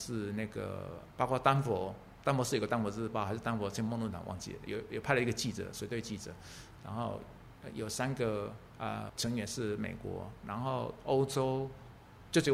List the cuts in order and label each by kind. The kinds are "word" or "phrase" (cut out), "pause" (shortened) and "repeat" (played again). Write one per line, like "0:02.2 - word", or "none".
0:09.1 - word